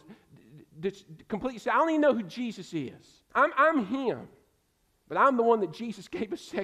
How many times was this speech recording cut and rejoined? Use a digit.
1